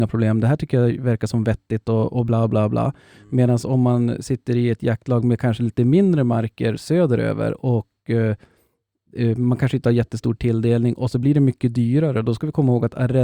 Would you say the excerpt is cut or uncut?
uncut